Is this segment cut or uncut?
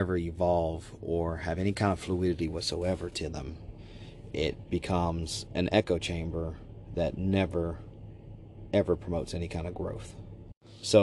uncut